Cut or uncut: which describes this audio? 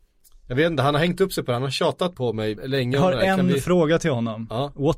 cut